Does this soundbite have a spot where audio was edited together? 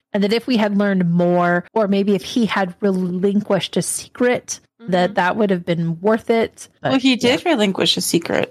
yes; 2 cuts; at 1.7 s, 4.7 s

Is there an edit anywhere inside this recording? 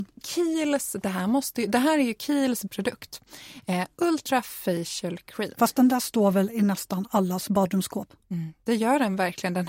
yes; 1 cut; at 2.7 s

